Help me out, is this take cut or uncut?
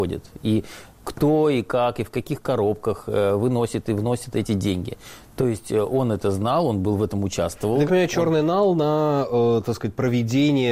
cut